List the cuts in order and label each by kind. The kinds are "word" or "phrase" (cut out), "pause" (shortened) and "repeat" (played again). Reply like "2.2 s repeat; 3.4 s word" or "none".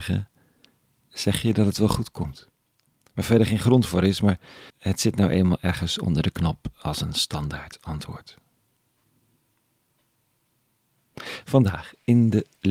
2.9 s pause; 4.7 s pause